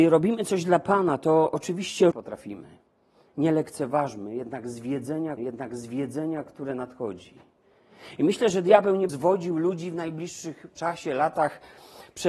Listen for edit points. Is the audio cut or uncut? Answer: cut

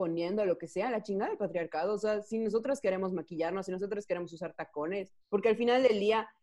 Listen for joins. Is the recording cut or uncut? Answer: cut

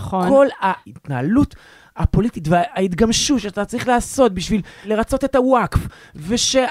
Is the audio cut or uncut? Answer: uncut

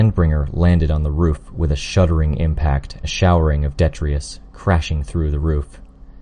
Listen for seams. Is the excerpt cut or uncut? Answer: cut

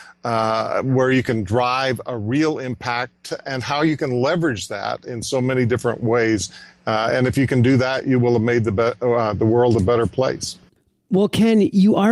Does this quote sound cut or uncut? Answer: uncut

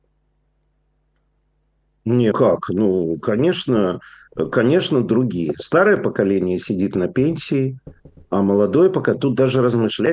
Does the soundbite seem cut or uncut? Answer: cut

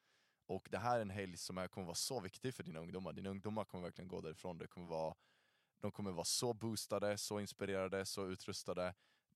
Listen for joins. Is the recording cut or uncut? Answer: uncut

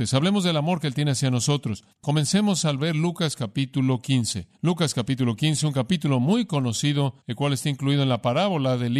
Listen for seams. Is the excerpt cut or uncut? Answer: cut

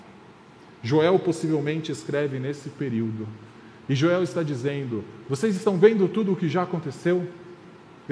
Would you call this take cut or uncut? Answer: uncut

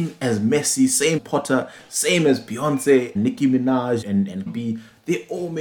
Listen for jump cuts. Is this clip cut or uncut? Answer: cut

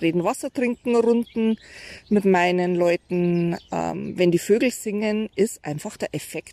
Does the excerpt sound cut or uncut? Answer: uncut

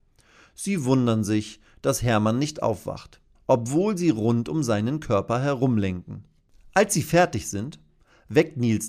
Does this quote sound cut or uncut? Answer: cut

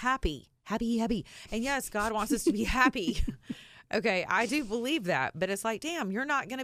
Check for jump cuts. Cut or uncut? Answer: uncut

